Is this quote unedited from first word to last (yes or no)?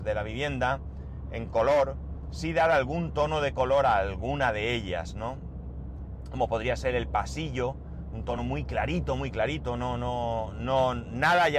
yes